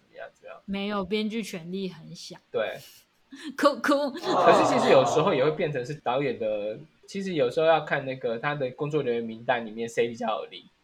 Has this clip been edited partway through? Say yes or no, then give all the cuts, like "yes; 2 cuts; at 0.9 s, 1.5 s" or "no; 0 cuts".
yes; 1 cut; at 2.5 s